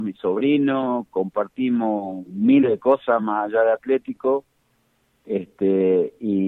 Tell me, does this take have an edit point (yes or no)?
no